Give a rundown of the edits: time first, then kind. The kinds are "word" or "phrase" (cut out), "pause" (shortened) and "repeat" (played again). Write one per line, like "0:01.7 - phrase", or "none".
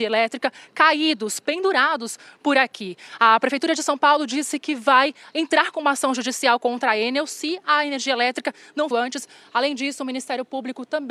0:08.9 - phrase